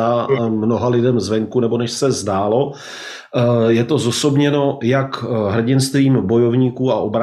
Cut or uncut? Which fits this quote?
uncut